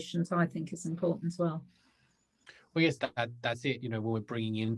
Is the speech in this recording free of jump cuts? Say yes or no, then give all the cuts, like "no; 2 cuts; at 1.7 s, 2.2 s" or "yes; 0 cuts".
no; 2 cuts; at 1.4 s, 3.0 s